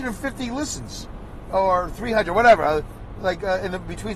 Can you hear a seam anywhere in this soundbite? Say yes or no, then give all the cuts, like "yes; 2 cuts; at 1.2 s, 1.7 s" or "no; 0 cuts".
no; 0 cuts